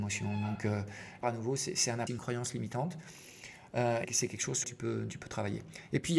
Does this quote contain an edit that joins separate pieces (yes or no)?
yes